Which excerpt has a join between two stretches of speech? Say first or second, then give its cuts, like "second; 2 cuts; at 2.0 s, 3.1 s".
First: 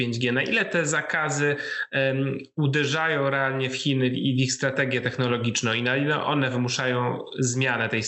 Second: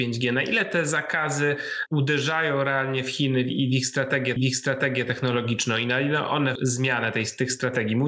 second; 3 cuts; at 1.9 s, 4.4 s, 6.6 s